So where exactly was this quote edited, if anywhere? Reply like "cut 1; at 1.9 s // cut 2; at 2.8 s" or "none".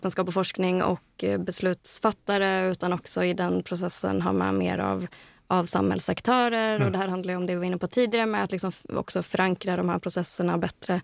none